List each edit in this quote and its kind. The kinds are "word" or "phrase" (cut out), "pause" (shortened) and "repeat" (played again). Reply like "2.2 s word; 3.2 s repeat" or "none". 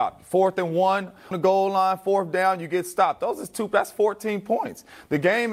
1.3 s word